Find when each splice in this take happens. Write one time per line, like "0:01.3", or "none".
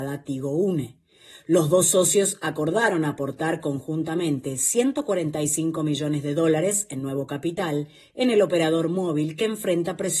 none